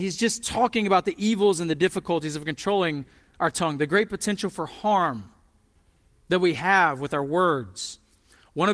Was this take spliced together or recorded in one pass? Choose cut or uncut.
uncut